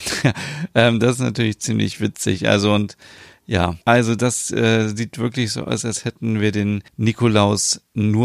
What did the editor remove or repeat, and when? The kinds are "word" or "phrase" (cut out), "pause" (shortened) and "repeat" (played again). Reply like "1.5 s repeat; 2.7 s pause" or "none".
3.8 s pause; 6.9 s pause